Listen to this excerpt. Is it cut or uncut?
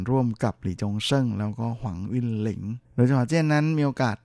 cut